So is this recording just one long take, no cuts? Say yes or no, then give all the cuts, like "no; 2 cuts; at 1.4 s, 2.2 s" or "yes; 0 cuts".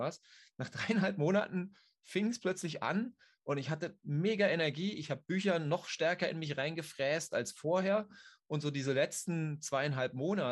yes; 0 cuts